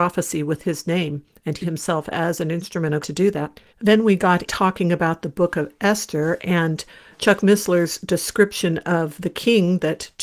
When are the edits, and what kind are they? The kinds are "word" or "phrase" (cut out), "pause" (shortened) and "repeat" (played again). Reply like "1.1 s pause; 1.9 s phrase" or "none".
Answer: 1.6 s word; 3.0 s word; 3.7 s pause; 4.4 s word; 7.1 s word